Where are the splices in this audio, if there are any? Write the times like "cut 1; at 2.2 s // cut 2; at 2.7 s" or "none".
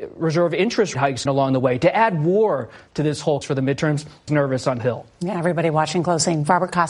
cut 1; at 0.9 s // cut 2; at 1.3 s // cut 3; at 3.4 s // cut 4; at 4.3 s // cut 5; at 4.8 s